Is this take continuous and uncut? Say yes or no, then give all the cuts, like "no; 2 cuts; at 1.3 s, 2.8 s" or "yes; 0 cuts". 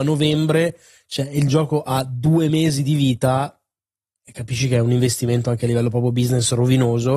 yes; 0 cuts